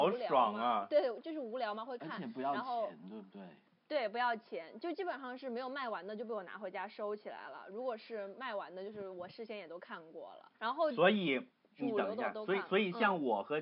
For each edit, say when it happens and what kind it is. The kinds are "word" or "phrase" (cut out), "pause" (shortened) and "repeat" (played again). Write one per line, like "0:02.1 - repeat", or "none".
0:10.5 - pause